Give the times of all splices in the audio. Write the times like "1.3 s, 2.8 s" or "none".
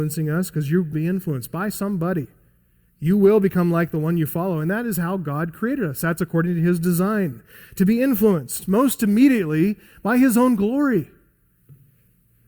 0.9 s